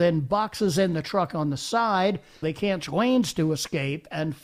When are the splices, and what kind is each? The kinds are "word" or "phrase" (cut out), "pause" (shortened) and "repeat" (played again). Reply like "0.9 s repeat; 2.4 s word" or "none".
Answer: 2.4 s word; 2.8 s word